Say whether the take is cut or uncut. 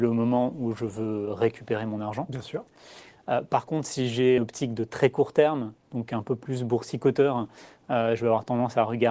cut